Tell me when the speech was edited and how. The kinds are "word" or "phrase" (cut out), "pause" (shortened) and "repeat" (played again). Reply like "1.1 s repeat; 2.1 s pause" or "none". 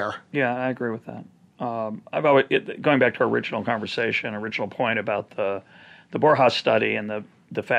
none

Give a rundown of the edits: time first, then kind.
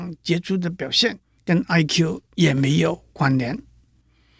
1.4 s pause; 2.3 s pause

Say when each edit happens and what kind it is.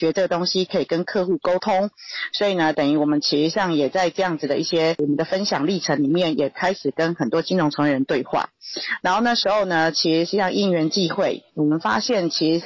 11.5 s pause

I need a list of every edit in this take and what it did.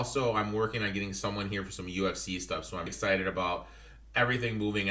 2.9 s word

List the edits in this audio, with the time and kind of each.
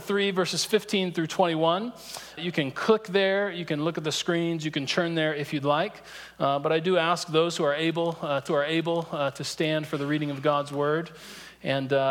2.4 s word; 8.5 s repeat

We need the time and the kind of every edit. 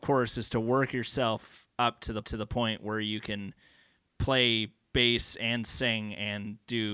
2.2 s repeat

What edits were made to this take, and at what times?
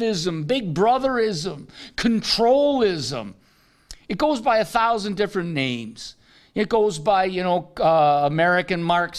none

